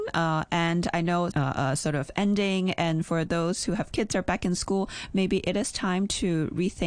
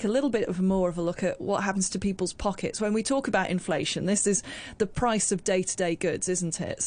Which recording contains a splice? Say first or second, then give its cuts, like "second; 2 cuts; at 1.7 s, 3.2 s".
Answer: first; 2 cuts; at 1.3 s, 3.9 s